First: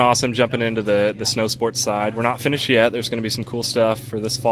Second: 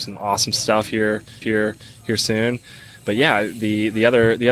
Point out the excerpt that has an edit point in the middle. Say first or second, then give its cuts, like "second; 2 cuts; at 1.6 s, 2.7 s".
second; 1 cut; at 1.4 s